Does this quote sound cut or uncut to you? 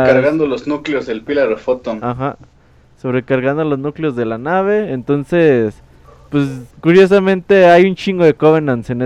cut